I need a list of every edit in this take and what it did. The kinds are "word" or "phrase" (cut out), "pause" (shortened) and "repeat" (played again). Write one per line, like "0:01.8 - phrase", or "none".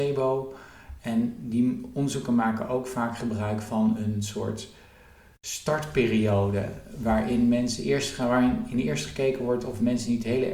none